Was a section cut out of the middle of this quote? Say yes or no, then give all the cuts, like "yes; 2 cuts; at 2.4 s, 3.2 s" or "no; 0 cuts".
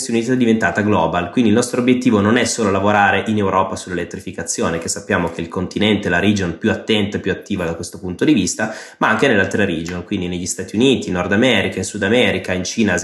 no; 0 cuts